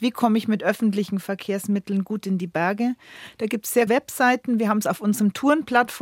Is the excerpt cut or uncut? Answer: cut